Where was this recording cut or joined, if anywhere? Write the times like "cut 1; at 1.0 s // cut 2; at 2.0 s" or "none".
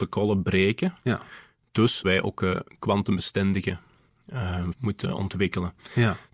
cut 1; at 1.0 s // cut 2; at 2.0 s // cut 3; at 4.7 s